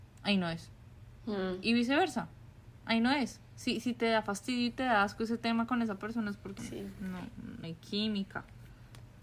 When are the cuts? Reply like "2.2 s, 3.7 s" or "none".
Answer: 6.6 s, 7.6 s